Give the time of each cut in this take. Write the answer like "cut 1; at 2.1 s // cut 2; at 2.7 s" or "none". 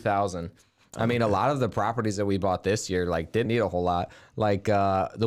cut 1; at 3.5 s